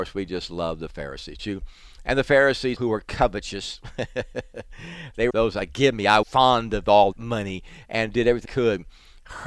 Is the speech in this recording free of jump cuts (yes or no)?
no